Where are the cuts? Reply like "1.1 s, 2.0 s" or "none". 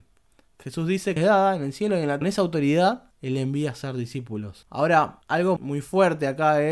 1.2 s, 2.2 s, 5.6 s

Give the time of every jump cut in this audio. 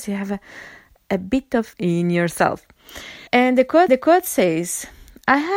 1.7 s, 3.3 s, 3.9 s

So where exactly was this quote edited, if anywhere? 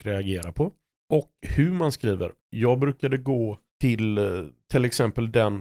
2.4 s, 3.7 s

